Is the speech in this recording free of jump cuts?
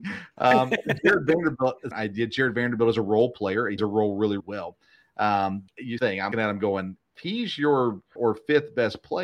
no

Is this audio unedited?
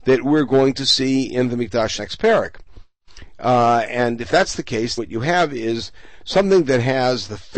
no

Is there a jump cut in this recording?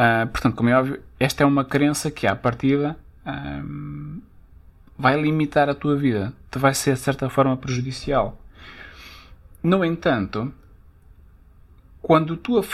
no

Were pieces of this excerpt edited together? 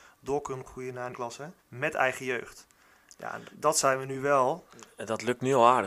yes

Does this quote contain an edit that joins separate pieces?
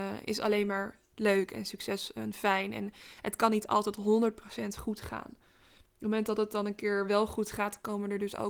no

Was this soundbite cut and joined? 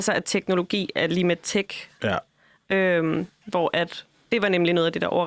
no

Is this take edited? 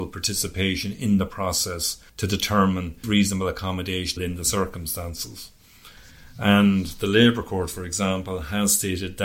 yes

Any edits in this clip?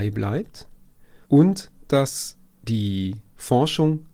yes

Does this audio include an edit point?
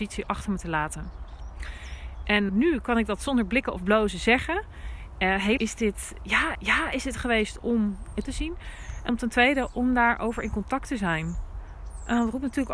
yes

